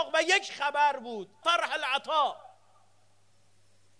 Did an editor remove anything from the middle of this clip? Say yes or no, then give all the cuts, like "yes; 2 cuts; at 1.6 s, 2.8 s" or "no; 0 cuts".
yes; 1 cut; at 1.4 s